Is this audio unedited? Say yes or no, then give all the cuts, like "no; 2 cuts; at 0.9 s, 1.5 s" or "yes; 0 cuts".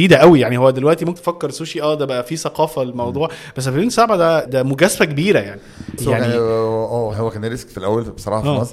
no; 4 cuts; at 1.2 s, 4.5 s, 6.0 s, 7.1 s